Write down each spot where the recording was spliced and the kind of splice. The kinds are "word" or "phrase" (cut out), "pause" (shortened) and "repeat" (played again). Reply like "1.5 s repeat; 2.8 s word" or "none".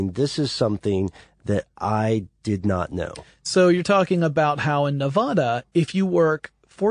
none